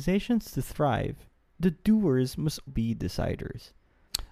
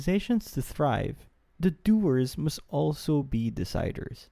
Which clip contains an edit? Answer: first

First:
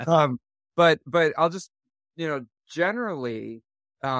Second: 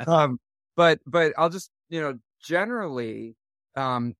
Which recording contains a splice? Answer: second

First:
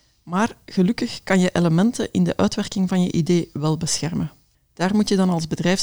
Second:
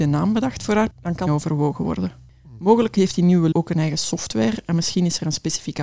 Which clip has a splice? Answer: second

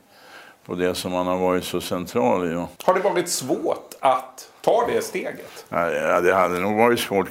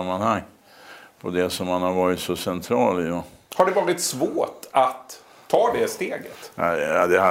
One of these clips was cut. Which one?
first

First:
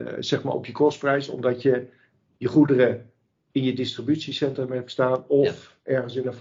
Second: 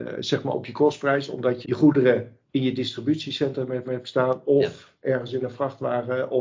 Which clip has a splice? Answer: second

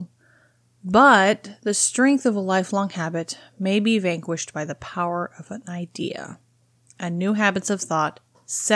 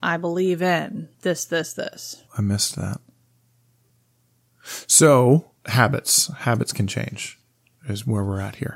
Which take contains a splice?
second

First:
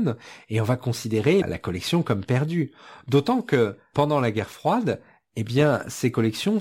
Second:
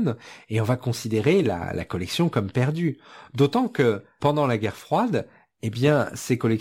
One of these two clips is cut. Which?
first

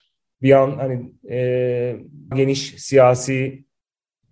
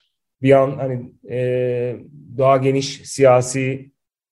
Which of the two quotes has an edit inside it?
first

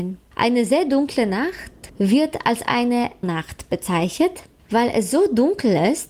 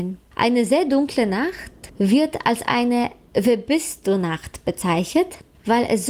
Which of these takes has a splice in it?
first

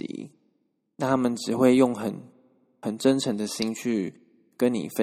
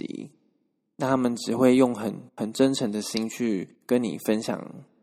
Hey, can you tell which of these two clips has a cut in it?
second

